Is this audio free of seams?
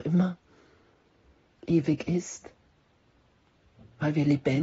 yes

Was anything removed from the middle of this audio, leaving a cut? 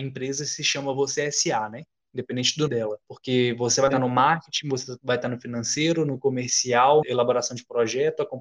yes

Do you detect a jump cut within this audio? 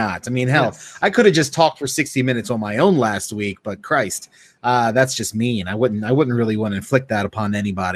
no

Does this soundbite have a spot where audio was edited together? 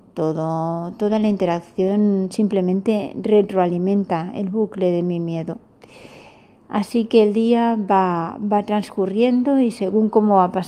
no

